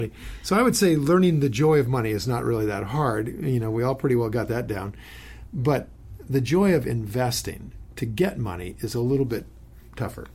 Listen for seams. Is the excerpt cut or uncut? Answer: uncut